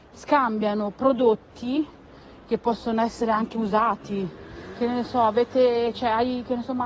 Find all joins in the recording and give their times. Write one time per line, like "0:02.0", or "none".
none